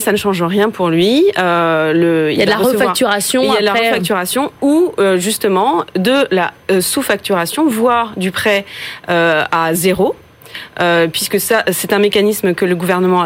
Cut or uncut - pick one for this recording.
uncut